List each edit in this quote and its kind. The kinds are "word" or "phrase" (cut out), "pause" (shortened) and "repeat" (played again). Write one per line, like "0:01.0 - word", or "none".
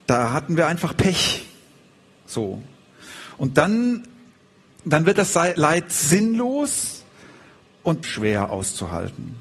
0:08.0 - phrase